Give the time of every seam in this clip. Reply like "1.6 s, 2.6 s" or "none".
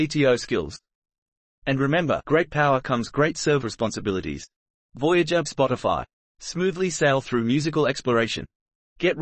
2.2 s, 3.6 s, 5.5 s